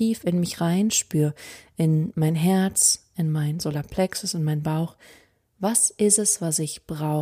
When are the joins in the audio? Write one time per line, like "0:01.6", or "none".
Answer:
none